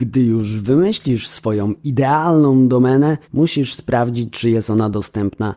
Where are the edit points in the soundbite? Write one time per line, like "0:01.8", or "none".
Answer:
0:03.2